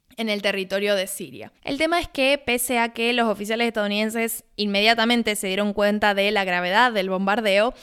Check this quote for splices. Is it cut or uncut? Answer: cut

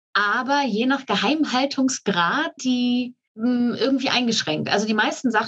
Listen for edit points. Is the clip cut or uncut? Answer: cut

